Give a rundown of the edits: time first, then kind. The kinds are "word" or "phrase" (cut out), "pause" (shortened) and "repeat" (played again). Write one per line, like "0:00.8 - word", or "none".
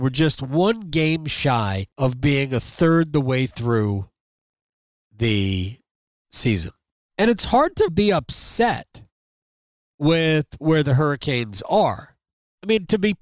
0:01.9 - pause
0:07.0 - pause
0:07.9 - word